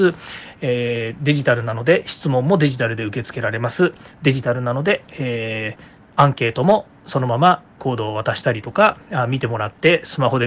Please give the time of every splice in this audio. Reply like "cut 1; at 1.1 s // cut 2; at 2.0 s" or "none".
cut 1; at 7.8 s